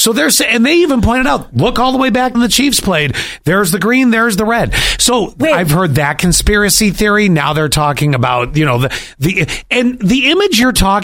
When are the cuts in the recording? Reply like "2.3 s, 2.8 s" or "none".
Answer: 2.3 s